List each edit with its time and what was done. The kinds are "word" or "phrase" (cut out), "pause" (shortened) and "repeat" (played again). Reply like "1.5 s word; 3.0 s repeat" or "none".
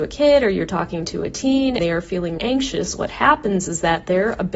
1.8 s word; 2.4 s word; 3.7 s word